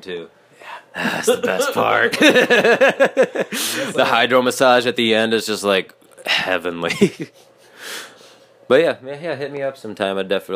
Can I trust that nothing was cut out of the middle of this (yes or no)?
yes